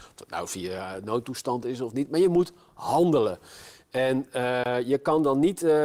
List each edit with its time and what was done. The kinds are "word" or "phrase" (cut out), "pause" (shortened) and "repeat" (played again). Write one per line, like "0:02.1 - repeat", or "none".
none